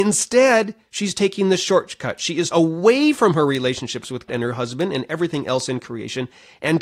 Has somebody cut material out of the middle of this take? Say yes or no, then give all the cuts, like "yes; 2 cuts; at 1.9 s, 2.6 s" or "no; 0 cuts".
yes; 2 cuts; at 2.5 s, 4.3 s